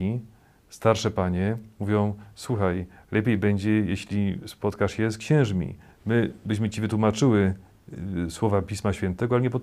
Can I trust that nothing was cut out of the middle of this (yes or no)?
yes